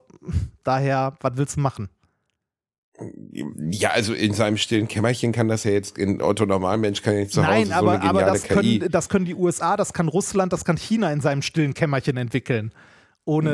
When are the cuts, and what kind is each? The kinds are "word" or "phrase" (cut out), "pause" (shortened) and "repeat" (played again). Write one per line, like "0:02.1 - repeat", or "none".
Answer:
none